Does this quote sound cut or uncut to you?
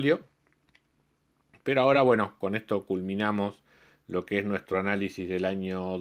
uncut